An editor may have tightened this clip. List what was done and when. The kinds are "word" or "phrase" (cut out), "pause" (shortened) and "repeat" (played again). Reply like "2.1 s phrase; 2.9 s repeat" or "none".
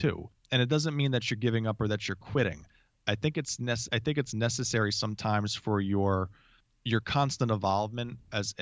3.9 s word